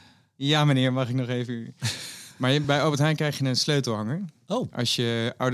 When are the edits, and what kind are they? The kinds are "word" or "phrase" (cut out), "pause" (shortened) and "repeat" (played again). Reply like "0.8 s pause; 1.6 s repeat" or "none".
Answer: none